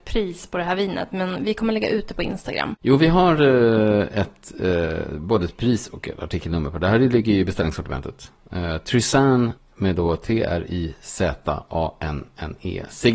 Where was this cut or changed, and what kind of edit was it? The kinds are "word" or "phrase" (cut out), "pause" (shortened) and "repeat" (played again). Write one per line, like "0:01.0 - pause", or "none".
0:09.6 - pause